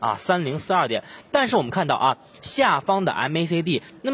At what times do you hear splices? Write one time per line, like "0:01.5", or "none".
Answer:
none